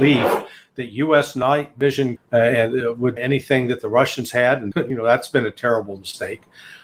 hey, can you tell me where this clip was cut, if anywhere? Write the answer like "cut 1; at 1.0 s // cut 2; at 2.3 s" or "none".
cut 1; at 2.2 s // cut 2; at 3.2 s // cut 3; at 4.7 s